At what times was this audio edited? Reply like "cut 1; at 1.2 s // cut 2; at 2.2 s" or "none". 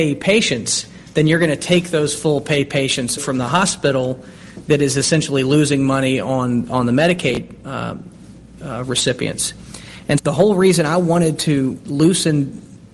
cut 1; at 3.2 s // cut 2; at 10.2 s